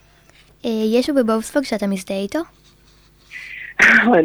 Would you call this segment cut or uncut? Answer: cut